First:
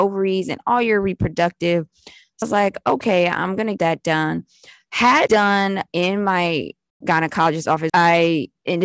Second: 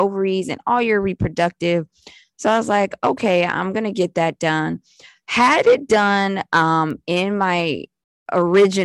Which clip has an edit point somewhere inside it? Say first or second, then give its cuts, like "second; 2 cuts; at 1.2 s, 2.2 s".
first; 6 cuts; at 2.4 s, 3.8 s, 5.3 s, 5.9 s, 7.0 s, 7.9 s